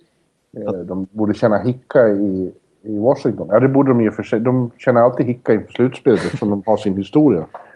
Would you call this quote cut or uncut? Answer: uncut